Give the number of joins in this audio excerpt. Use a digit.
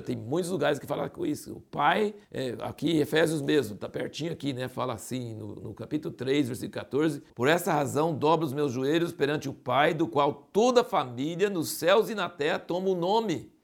2